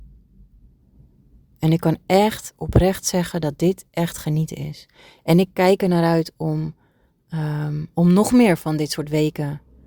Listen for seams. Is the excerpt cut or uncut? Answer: uncut